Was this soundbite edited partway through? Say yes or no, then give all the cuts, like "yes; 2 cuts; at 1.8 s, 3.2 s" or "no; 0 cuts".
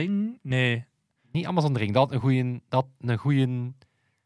no; 0 cuts